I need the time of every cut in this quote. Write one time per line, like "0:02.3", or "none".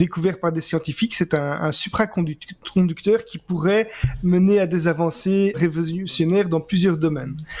0:05.5